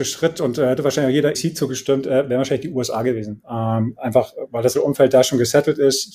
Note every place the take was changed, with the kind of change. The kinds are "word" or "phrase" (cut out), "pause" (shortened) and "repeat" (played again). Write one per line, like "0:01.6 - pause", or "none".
0:01.3 - word
0:04.7 - word